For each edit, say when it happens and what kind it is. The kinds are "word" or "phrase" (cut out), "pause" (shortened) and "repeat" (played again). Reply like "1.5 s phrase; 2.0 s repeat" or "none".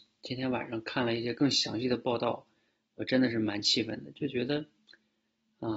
none